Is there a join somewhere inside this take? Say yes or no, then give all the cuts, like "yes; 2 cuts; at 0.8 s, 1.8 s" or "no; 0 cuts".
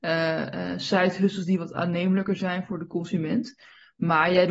no; 0 cuts